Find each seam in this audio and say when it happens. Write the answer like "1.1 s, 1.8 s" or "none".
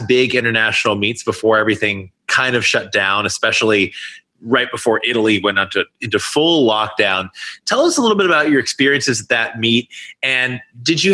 none